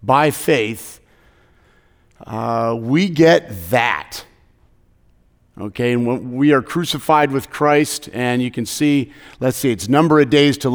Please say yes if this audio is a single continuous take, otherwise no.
yes